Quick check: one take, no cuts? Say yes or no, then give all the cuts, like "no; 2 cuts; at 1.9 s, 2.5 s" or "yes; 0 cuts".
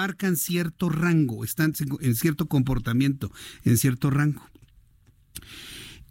yes; 0 cuts